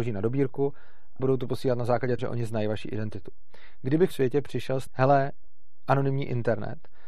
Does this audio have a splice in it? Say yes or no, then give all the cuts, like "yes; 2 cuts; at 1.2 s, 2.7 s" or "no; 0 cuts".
yes; 4 cuts; at 1.2 s, 2.2 s, 4.1 s, 4.9 s